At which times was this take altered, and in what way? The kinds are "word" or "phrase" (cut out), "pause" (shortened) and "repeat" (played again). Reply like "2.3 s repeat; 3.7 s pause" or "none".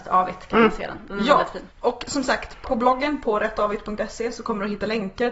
1.7 s pause; 2.6 s word